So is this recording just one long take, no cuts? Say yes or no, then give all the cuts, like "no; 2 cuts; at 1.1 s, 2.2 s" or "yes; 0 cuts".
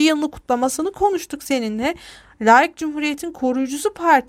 yes; 0 cuts